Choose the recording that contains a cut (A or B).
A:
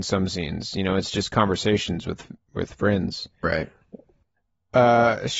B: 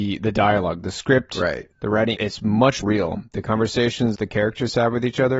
B